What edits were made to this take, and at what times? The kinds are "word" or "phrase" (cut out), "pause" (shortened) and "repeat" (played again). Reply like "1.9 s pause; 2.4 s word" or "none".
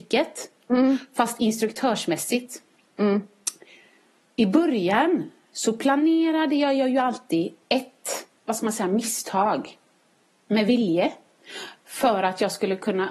7.6 s pause